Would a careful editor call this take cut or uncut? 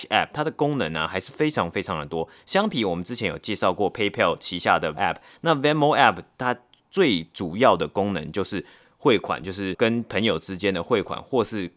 cut